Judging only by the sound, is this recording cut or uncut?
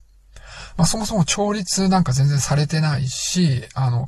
uncut